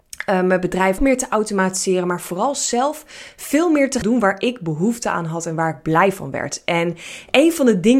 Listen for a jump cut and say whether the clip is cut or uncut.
cut